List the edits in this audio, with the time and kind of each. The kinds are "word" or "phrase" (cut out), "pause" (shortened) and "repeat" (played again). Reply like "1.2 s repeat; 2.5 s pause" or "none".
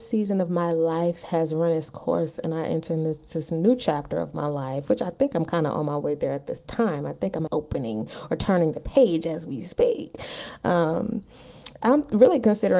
7.5 s word